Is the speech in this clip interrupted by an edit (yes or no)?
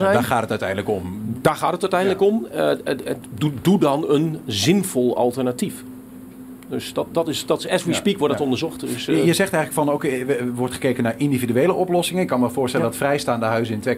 yes